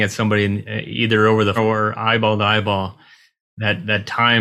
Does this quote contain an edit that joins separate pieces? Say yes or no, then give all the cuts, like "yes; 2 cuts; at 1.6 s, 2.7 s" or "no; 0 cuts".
yes; 1 cut; at 1.6 s